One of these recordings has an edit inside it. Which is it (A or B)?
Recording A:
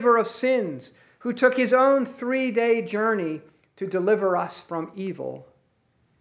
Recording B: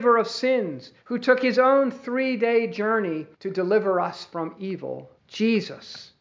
B